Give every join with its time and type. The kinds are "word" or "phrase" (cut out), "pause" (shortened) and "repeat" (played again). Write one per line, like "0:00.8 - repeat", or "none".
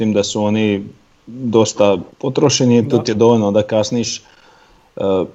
0:02.1 - pause